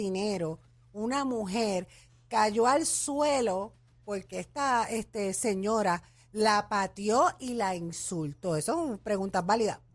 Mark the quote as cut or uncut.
uncut